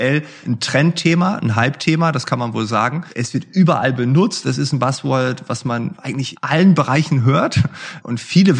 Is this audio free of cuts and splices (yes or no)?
yes